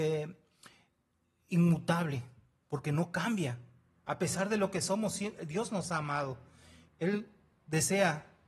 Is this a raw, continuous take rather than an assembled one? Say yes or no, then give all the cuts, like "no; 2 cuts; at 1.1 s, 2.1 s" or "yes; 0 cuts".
yes; 0 cuts